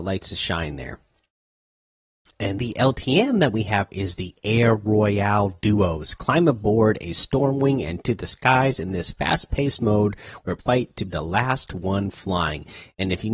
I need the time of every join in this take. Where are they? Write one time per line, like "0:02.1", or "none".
0:02.6
0:03.9
0:08.0
0:10.6
0:11.1